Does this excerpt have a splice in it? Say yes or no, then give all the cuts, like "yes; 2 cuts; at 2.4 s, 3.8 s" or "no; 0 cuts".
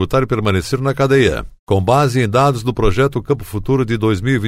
no; 0 cuts